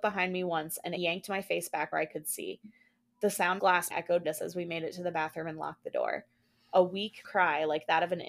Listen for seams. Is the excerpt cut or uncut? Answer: cut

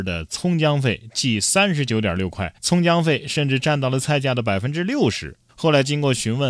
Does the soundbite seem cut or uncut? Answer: cut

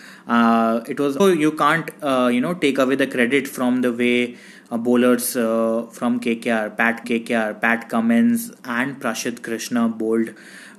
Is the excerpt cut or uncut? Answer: cut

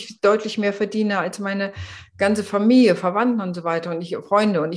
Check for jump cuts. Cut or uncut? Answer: uncut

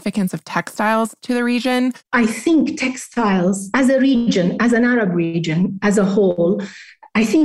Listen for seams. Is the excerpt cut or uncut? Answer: cut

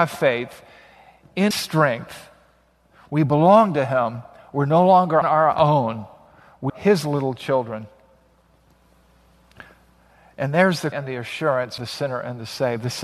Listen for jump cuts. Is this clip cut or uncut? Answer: cut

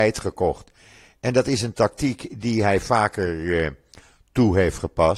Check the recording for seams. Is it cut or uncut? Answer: uncut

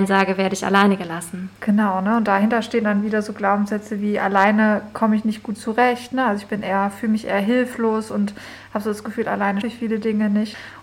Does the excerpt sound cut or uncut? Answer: cut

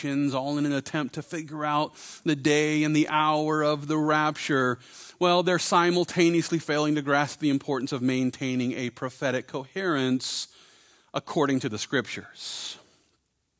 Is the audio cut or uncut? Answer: uncut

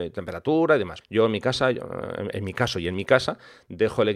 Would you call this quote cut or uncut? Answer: cut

